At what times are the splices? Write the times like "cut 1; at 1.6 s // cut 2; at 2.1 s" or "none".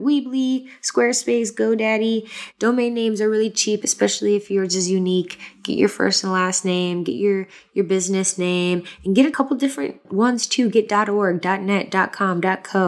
none